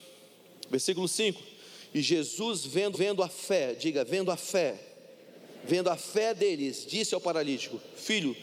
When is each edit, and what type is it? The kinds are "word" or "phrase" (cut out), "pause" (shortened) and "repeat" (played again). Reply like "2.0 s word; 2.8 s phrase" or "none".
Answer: 2.9 s repeat